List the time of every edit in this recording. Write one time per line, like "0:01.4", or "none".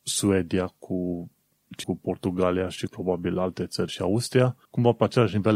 0:01.8
0:02.9
0:03.9
0:04.6